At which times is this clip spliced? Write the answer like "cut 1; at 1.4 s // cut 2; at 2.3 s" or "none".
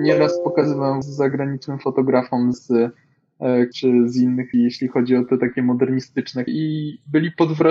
cut 1; at 1.0 s // cut 2; at 2.5 s // cut 3; at 3.7 s // cut 4; at 4.5 s // cut 5; at 6.5 s